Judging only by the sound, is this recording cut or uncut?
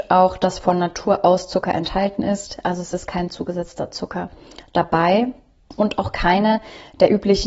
uncut